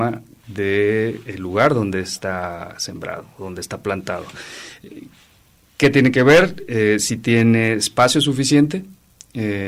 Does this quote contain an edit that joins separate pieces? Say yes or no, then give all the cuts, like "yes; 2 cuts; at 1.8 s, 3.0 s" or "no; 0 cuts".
no; 0 cuts